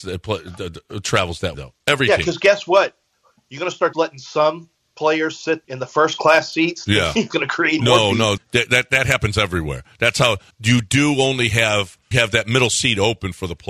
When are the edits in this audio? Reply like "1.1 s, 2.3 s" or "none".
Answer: 1.5 s, 3.9 s, 5.6 s, 7.3 s, 7.8 s, 8.4 s, 10.5 s, 12.1 s